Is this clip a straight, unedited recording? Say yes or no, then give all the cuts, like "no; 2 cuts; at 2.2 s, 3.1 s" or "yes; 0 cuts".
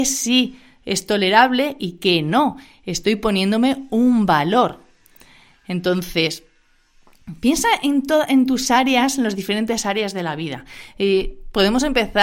yes; 0 cuts